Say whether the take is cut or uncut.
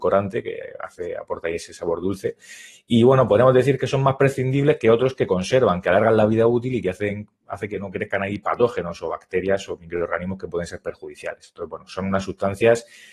uncut